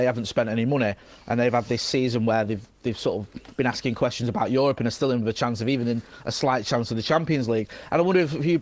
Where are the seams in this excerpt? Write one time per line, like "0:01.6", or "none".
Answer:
none